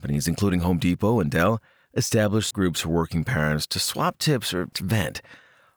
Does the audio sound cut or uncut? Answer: cut